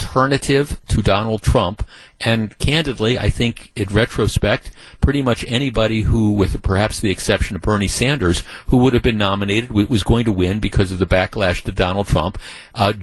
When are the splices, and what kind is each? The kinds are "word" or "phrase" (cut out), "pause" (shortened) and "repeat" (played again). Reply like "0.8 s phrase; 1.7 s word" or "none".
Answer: none

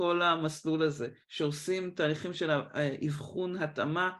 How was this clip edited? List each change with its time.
1.2 s pause

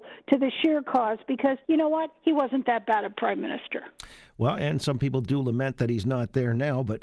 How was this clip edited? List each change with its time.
1.6 s pause

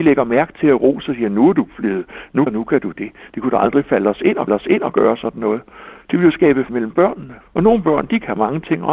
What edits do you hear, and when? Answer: 2.5 s phrase; 4.5 s repeat; 6.7 s word; 7.4 s pause

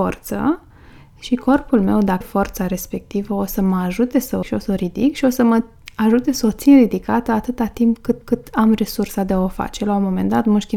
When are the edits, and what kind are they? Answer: 2.2 s word; 4.4 s word; 8.2 s repeat

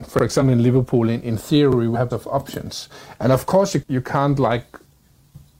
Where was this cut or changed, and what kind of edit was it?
2.1 s word; 3.8 s word

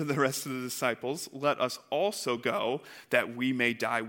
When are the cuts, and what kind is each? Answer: none

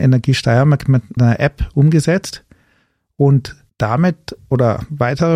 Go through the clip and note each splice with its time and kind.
1.2 s word; 3.7 s pause

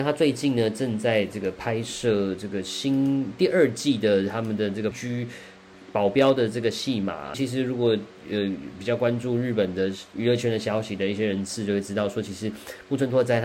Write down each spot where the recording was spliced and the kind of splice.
4.9 s word; 7.3 s phrase

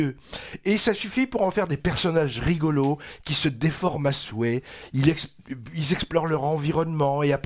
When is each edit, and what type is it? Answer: none

